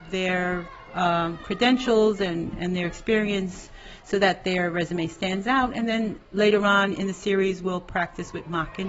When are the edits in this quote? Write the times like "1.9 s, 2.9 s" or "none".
none